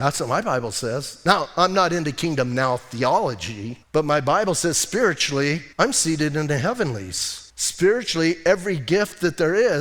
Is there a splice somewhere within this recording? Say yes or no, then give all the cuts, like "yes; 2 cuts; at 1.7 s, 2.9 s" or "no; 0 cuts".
yes; 3 cuts; at 3.8 s, 5.7 s, 7.5 s